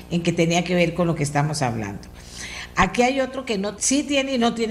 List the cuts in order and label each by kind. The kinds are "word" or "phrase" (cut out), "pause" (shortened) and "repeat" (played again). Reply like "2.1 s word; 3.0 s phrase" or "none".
3.8 s word